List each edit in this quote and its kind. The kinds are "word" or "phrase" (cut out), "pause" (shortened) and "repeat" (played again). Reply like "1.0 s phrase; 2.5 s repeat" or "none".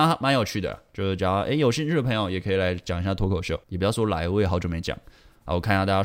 3.6 s pause